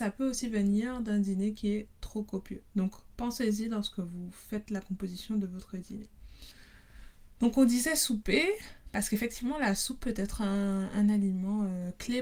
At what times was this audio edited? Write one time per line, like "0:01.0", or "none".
0:02.7